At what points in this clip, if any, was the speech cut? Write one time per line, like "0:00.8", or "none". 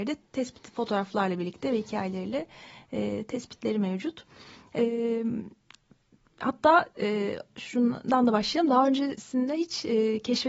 none